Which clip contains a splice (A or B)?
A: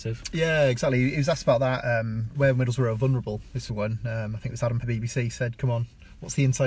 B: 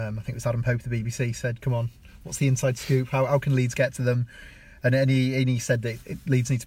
A